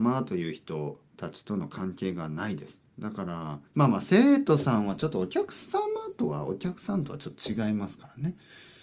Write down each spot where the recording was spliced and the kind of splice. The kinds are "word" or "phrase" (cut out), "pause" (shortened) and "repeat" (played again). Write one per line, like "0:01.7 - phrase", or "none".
0:01.1 - pause
0:02.9 - pause
0:03.7 - pause